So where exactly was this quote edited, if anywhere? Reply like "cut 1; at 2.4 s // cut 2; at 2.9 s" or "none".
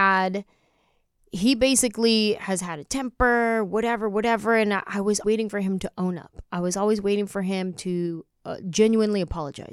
cut 1; at 5.2 s